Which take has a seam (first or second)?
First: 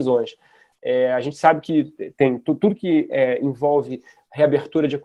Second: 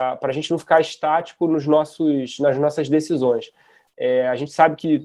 first